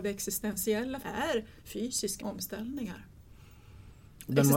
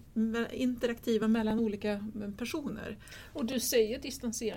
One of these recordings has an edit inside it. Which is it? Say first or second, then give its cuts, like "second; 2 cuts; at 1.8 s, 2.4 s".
first; 2 cuts; at 1.0 s, 2.2 s